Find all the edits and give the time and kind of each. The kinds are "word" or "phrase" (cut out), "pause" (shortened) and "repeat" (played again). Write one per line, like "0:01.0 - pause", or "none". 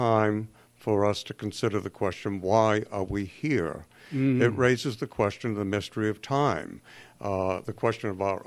none